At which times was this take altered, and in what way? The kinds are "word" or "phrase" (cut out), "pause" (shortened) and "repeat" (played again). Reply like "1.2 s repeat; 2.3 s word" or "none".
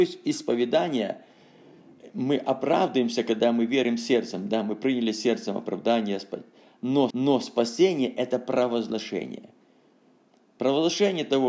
7.1 s repeat

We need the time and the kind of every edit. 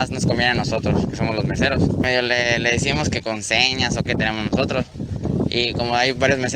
4.1 s phrase

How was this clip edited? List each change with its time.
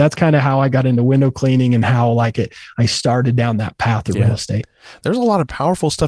none

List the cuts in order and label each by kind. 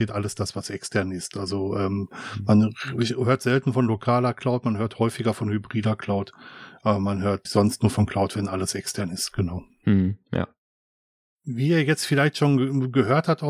7.5 s word

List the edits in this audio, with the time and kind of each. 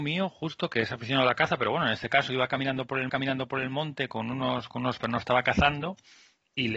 3.1 s repeat; 5.0 s word

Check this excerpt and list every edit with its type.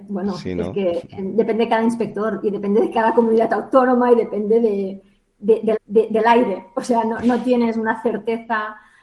5.8 s repeat

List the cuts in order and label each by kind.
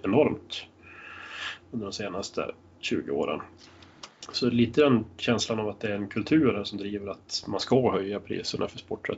none

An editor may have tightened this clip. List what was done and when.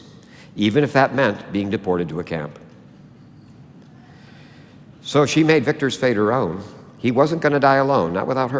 none

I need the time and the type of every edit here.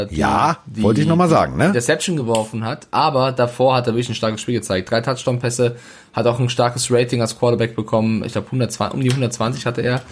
none

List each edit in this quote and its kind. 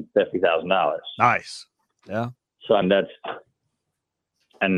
2.8 s word

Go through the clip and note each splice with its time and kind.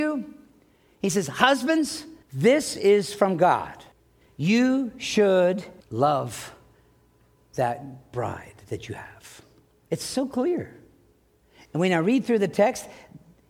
2.2 s pause; 3.9 s pause; 5.8 s pause; 9.6 s pause

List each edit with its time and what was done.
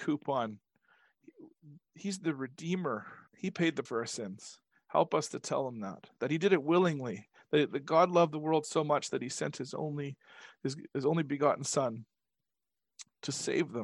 3.3 s pause; 3.9 s word

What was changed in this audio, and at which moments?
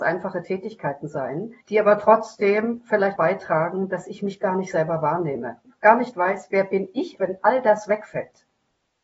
1.6 s pause; 3.2 s word; 7.2 s word

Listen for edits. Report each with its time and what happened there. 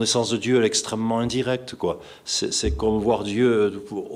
2.5 s word

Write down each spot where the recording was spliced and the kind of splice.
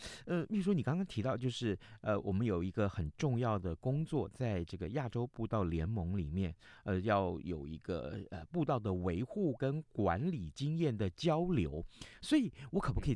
none

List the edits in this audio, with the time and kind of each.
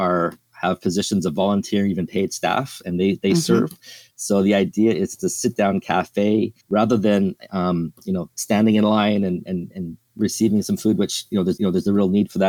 6.6 s pause; 8.3 s pause; 11.6 s repeat

